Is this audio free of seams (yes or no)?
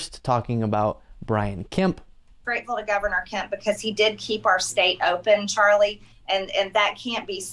yes